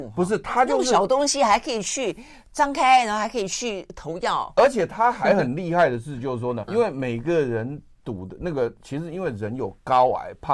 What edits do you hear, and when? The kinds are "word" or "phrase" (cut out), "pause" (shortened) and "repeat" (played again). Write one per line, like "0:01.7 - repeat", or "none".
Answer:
0:06.7 - word